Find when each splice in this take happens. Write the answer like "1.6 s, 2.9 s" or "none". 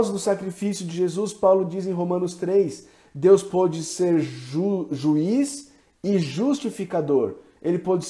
none